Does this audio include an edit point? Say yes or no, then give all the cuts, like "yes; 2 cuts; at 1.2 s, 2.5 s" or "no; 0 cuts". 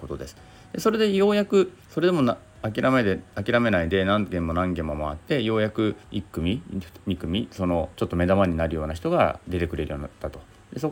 yes; 4 cuts; at 1.8 s, 3.3 s, 6.0 s, 7.9 s